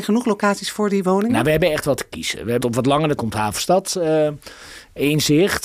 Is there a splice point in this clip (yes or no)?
yes